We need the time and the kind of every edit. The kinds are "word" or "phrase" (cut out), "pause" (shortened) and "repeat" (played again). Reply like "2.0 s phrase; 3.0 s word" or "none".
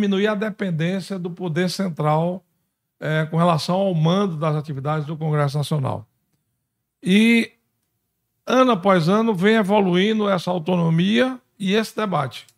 none